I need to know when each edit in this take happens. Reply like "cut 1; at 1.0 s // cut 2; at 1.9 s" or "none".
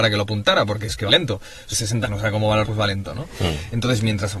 cut 1; at 1.1 s // cut 2; at 1.7 s // cut 3; at 2.0 s // cut 4; at 2.6 s